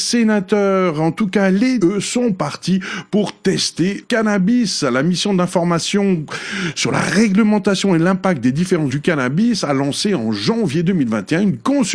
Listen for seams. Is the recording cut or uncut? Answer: cut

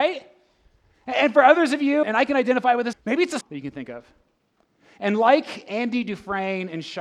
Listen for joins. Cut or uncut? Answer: cut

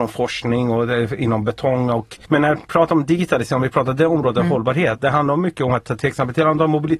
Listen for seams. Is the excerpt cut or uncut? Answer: cut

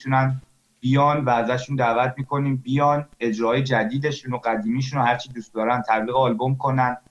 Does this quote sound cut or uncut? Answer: cut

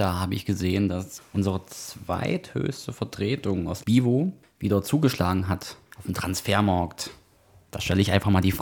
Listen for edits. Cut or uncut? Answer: cut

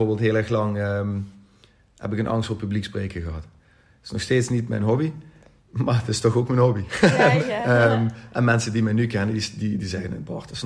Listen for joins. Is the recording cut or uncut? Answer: cut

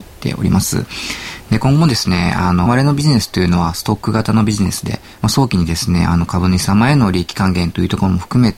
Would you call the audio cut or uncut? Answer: cut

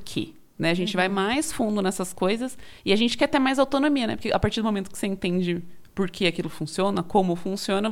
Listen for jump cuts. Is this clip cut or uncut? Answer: uncut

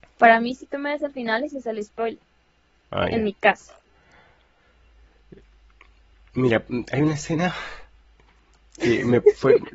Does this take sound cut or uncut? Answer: uncut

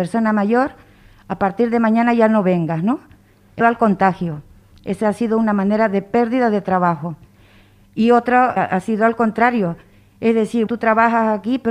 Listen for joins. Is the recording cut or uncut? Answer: cut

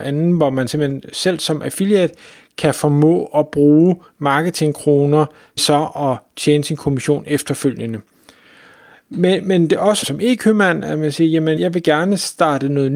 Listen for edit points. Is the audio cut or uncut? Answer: cut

